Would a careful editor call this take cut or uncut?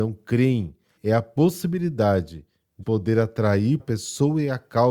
cut